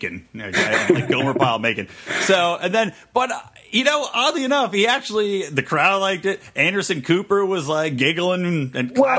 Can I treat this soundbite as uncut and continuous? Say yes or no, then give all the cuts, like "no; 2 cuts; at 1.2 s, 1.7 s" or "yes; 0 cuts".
yes; 0 cuts